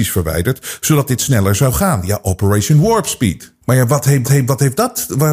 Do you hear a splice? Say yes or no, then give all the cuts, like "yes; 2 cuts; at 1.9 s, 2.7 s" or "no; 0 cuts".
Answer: yes; 2 cuts; at 3.6 s, 4.2 s